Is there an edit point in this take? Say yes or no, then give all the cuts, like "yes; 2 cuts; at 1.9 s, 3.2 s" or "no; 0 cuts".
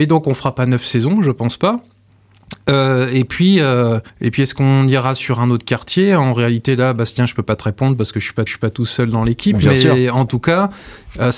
yes; 2 cuts; at 4.1 s, 8.5 s